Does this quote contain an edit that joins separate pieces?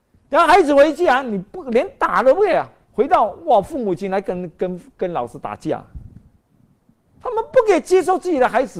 yes; 1 cut; at 2.9 s

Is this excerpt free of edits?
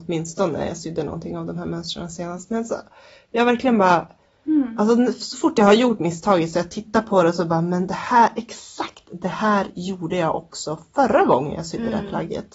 yes; 0 cuts

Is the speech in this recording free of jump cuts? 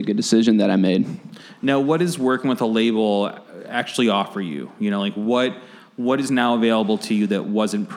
yes; 0 cuts

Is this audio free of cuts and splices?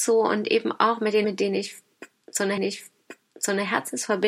no; 2 cuts; at 1.2 s, 2.6 s

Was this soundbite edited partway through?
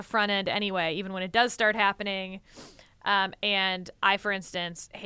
no; 0 cuts

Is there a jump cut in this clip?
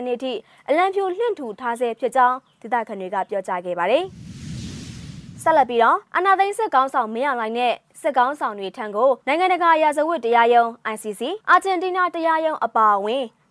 yes; 3 cuts; at 6.1 s, 9.2 s, 11.4 s

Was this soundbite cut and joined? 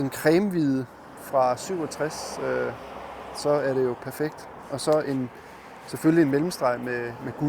no; 0 cuts

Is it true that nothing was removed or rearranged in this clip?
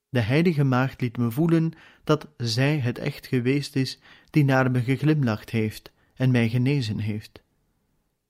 yes; 0 cuts

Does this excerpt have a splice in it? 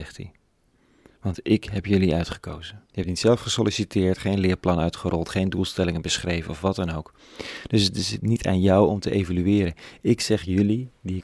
yes; 1 cut; at 2.9 s

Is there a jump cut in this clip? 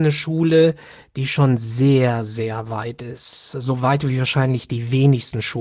no; 0 cuts

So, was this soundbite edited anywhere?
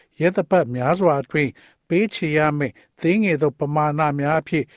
no; 0 cuts

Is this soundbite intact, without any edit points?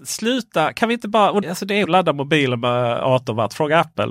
no; 2 cuts; at 1.4 s, 1.8 s

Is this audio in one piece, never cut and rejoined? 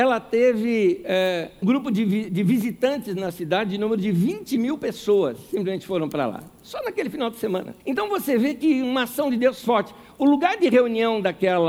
no; 4 cuts; at 1.6 s, 2.3 s, 7.8 s, 8.8 s

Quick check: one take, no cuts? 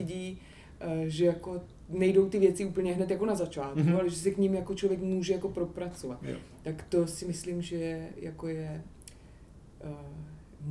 yes; 0 cuts

